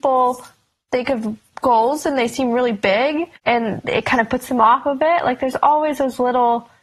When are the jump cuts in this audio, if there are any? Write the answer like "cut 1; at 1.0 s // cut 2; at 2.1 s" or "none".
cut 1; at 3.3 s